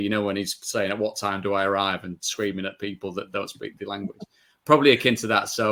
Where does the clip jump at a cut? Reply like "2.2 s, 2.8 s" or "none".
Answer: none